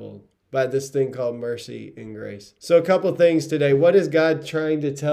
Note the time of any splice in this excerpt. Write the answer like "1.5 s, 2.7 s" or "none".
2.6 s